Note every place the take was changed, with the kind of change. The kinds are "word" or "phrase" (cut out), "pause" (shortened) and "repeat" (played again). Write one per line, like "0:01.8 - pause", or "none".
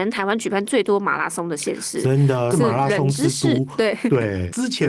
0:02.5 - phrase